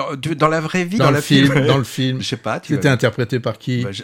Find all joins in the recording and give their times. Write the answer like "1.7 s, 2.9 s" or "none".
1.0 s